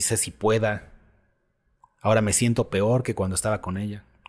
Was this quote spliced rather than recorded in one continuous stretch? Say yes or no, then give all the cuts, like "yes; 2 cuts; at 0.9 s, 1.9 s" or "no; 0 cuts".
no; 0 cuts